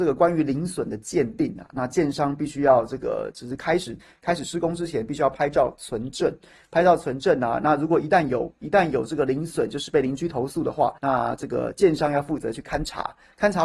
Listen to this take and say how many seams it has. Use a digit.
1